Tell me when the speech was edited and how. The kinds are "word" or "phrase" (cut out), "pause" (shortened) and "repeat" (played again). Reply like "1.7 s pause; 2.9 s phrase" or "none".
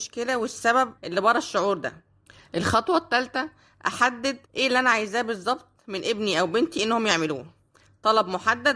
1.0 s pause; 2.3 s pause; 4.5 s pause